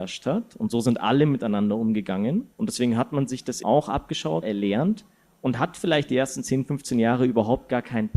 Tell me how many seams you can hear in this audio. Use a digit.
3